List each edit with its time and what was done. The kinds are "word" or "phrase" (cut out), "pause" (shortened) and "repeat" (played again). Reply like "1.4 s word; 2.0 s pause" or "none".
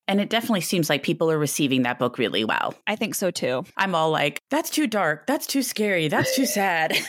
2.8 s pause; 3.7 s pause; 4.4 s pause